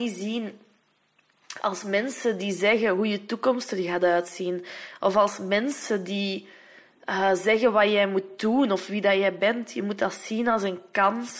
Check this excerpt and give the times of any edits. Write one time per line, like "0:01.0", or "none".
none